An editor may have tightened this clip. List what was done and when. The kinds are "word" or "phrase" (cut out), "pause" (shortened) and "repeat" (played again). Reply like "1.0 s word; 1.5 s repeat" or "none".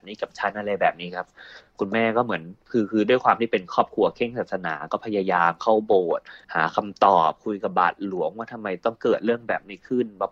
6.4 s pause

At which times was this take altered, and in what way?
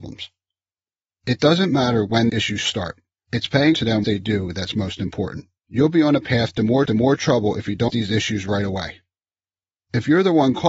2.3 s word; 3.7 s word; 4.0 s word; 5.6 s pause; 6.9 s repeat; 7.9 s word

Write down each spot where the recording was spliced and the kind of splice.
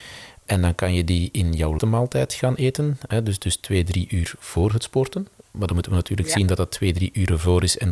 1.8 s word

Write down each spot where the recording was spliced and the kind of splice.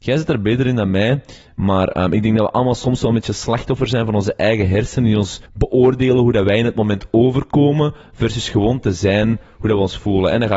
5.5 s pause

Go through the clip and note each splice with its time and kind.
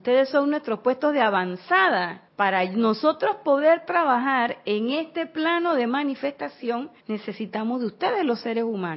2.3 s pause; 7.0 s pause

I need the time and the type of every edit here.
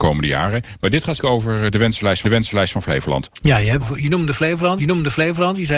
1.2 s word; 2.2 s repeat; 3.8 s word; 4.8 s repeat

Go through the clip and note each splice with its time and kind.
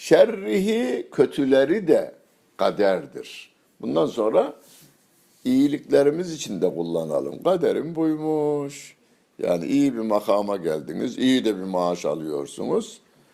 none

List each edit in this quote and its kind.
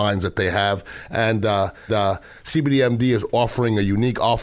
1.9 s repeat

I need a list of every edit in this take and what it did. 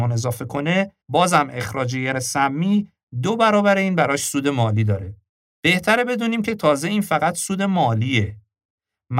1.0 s pause; 2.1 s word; 5.3 s pause

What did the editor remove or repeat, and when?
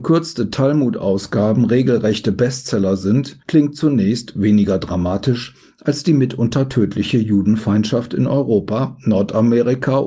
3.4 s pause

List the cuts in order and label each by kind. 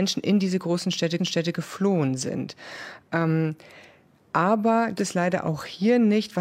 1.2 s repeat; 4.9 s phrase

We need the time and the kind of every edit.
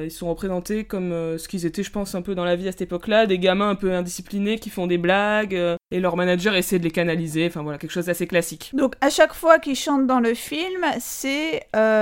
none

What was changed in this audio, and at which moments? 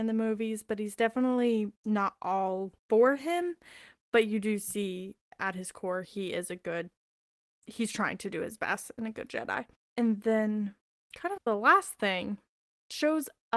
1.8 s pause; 2.8 s pause; 9.8 s pause

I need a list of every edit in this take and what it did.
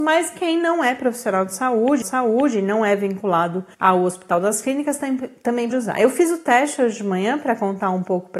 2.0 s repeat; 3.7 s pause; 5.7 s word

